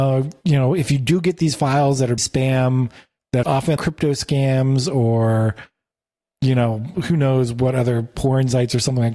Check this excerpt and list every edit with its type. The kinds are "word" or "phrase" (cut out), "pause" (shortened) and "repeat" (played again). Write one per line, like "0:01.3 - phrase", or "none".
0:02.2 - word
0:03.4 - word
0:03.8 - word

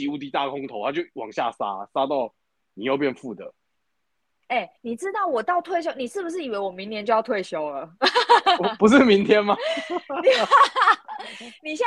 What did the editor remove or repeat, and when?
0:04.8 - pause

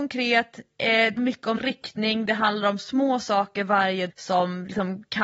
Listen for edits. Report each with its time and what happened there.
0:01.2 - word
0:01.6 - word
0:04.1 - word

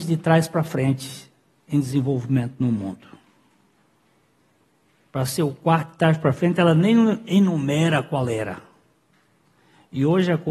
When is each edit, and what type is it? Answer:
none

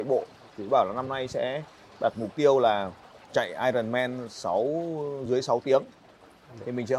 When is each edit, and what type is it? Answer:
none

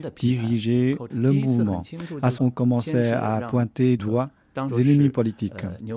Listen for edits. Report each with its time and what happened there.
0:01.1 - word
0:02.4 - word
0:04.0 - word
0:04.7 - word

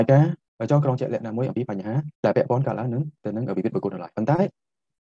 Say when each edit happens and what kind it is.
0:02.1 - pause
0:03.2 - pause

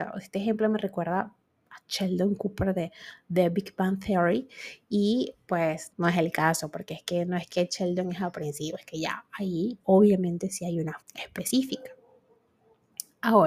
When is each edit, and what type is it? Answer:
0:05.9 - word
0:09.8 - word
0:11.0 - word

